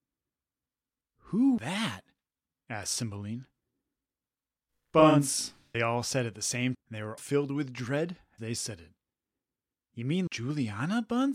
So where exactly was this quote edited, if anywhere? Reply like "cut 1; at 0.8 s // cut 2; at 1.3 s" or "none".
cut 1; at 1.6 s // cut 2; at 5.7 s // cut 3; at 6.7 s // cut 4; at 7.2 s // cut 5; at 8.4 s // cut 6; at 10.3 s

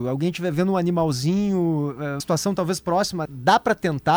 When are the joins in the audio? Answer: cut 1; at 2.2 s // cut 2; at 3.2 s

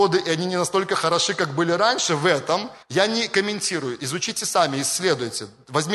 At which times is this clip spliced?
cut 1; at 2.8 s

